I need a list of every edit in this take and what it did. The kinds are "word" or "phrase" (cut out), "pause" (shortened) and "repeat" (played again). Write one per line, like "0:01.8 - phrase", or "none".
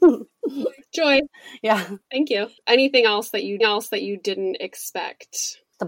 0:03.6 - repeat